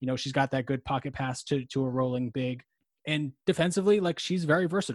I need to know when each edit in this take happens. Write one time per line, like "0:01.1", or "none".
none